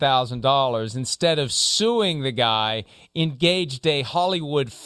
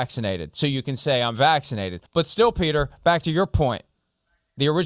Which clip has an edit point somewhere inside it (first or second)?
second